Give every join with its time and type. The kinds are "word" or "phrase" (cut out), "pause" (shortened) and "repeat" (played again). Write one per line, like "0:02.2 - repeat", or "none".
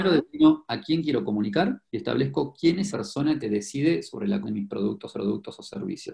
0:01.9 - pause
0:02.9 - word
0:03.4 - word
0:04.4 - word
0:05.1 - repeat